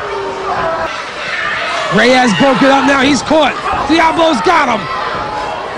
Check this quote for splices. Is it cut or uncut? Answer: uncut